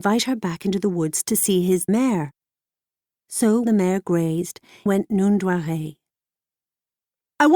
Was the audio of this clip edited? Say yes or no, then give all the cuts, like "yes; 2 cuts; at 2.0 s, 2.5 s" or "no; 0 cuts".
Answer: yes; 3 cuts; at 1.9 s, 3.6 s, 4.9 s